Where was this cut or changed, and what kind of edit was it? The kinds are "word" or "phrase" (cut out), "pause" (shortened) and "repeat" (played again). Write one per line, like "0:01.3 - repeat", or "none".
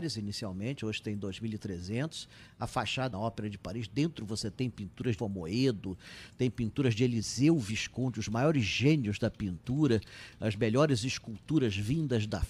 0:03.1 - phrase
0:05.2 - word